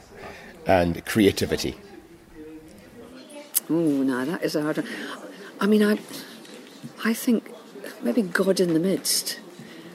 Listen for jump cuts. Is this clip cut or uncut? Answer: cut